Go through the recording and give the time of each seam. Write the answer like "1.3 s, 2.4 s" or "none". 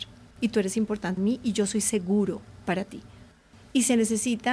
1.2 s

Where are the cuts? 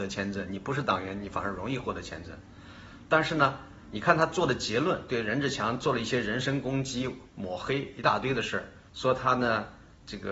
8.9 s

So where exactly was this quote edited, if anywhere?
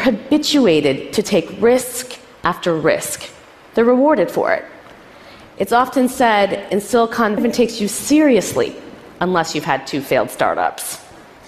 7.4 s

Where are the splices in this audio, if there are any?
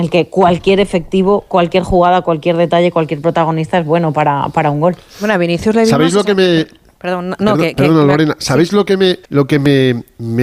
9.2 s

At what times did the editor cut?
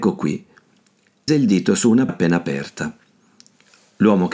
1.3 s, 2.1 s

